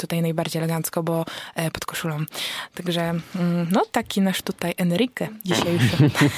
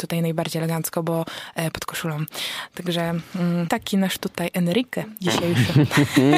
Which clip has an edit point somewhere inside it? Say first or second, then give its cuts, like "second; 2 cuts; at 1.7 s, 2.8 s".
second; 1 cut; at 3.7 s